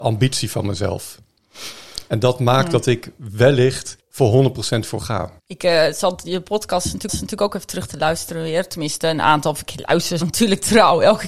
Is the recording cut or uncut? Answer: cut